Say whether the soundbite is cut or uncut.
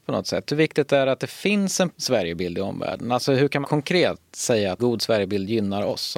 cut